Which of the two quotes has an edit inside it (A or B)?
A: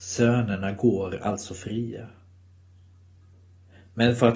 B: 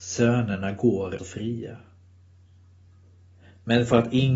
B